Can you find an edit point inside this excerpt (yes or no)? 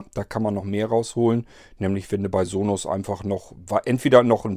no